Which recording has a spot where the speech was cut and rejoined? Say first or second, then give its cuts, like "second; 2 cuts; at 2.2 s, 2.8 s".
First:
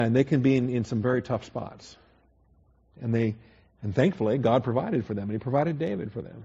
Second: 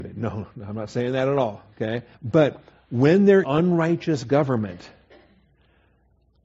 second; 2 cuts; at 2.1 s, 3.4 s